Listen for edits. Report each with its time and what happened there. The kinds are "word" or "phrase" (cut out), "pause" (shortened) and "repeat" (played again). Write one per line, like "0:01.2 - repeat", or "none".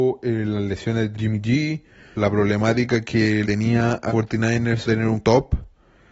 0:01.1 - word
0:02.1 - word
0:03.4 - word
0:04.1 - word
0:04.9 - word
0:05.2 - word